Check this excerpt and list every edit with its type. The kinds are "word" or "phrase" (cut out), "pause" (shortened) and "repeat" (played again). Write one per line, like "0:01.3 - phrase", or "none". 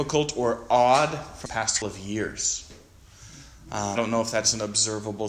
0:01.5 - word
0:01.8 - word
0:04.0 - word